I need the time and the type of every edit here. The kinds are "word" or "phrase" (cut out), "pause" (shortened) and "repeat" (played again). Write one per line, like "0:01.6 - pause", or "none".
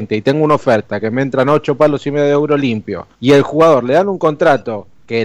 0:03.1 - pause